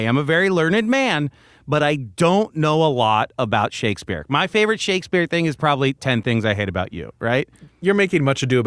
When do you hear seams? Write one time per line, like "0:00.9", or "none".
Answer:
none

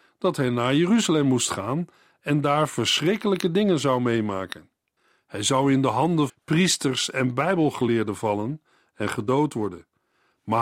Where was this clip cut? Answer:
0:06.3

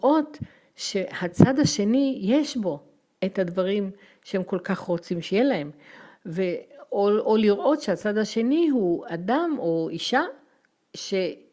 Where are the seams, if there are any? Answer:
none

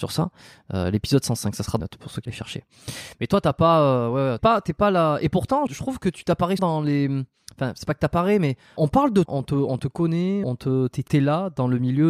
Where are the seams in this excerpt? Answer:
0:01.8
0:02.2
0:04.4
0:05.7
0:06.6
0:08.8
0:09.3
0:10.4
0:11.1

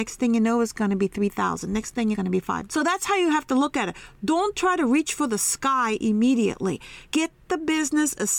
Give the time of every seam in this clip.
0:02.1
0:02.7
0:07.0

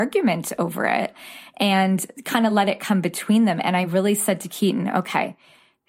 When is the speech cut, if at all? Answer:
none

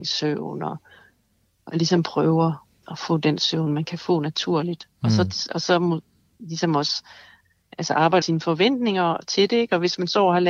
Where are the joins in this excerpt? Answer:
0:02.8
0:08.2

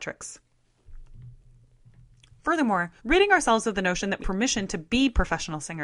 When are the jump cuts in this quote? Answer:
0:03.0
0:04.2

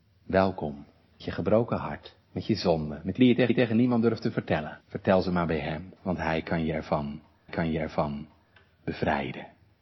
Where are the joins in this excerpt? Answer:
0:01.2
0:02.2
0:03.2
0:03.5
0:04.8
0:06.0
0:07.5

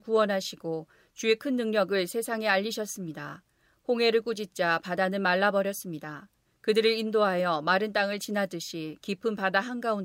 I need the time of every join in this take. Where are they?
none

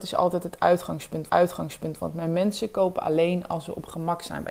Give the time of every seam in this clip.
0:01.3

